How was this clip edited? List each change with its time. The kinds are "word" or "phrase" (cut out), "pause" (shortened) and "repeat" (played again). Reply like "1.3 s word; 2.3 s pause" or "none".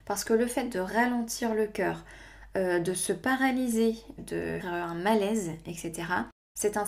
4.2 s word; 4.6 s word